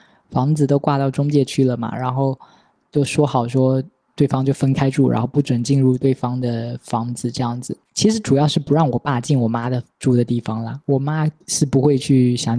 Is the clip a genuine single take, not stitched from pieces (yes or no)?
no